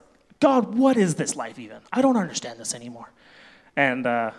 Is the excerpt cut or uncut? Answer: uncut